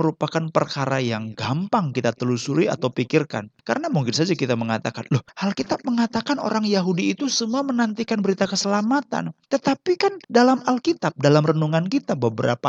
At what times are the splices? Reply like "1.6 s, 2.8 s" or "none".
9.4 s, 10.2 s